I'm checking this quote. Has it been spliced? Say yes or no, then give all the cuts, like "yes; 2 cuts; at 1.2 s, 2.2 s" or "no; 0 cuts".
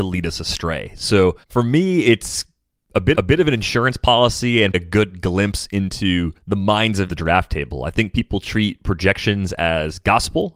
yes; 5 cuts; at 1.4 s, 3.1 s, 4.7 s, 6.4 s, 7.1 s